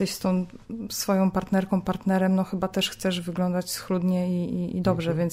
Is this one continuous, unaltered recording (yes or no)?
yes